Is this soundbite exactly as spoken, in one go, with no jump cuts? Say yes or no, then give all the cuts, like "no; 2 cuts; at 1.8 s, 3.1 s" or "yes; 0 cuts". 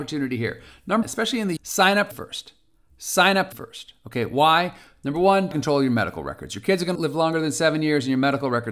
no; 6 cuts; at 1.0 s, 1.6 s, 2.1 s, 3.5 s, 5.5 s, 7.0 s